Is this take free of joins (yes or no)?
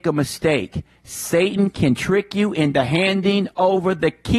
yes